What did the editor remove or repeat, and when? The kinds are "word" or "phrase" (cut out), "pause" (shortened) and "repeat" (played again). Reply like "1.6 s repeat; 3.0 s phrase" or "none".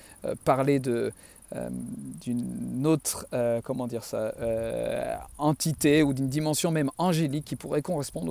none